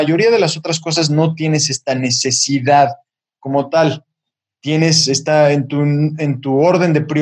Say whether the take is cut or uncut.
uncut